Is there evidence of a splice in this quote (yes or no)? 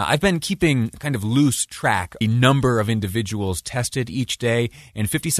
yes